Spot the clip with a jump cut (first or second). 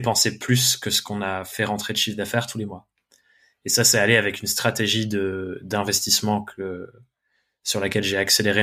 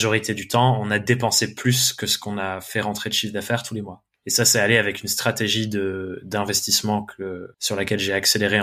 second